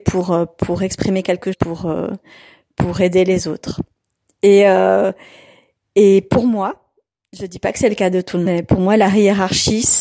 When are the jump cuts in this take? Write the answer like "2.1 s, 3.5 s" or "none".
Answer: 1.5 s, 8.5 s